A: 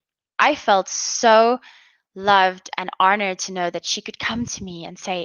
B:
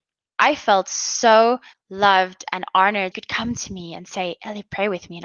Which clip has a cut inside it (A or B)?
B